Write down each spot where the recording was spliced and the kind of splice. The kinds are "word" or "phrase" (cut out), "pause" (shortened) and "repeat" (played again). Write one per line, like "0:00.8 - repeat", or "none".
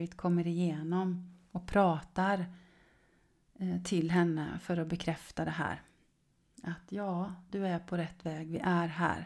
none